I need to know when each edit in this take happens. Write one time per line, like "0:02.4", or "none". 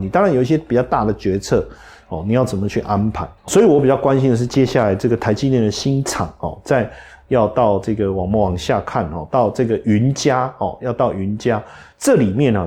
0:03.5

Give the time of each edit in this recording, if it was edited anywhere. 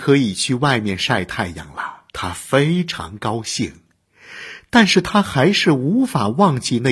0:02.1

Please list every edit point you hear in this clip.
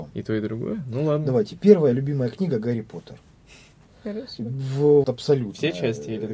0:05.0

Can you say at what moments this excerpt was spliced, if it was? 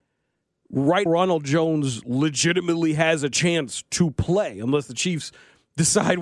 0:01.1

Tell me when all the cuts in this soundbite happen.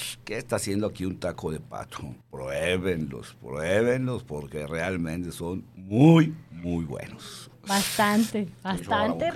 0:02.2

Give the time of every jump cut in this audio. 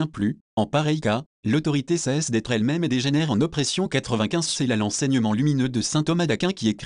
none

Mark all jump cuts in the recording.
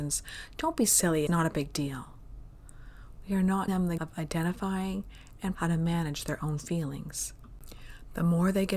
0:01.3
0:03.7
0:04.0
0:05.5

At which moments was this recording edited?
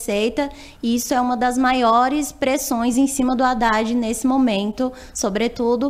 none

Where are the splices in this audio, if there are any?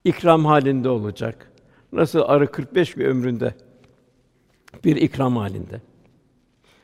0:02.9

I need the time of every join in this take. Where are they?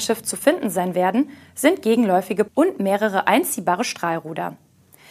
0:02.5

